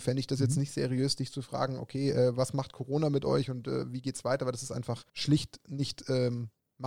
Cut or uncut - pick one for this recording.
cut